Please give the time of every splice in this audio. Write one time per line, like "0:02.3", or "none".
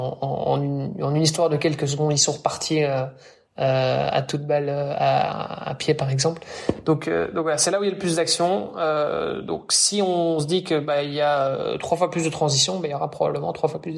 none